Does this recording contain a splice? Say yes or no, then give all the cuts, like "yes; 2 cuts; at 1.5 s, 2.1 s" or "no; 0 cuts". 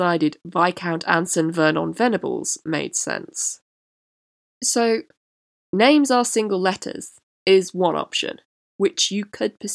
no; 0 cuts